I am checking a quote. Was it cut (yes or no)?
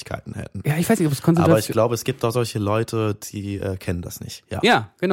no